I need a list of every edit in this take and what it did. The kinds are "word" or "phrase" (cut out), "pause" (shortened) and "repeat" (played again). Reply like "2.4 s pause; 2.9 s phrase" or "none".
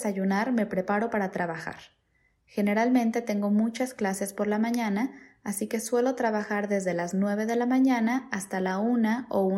none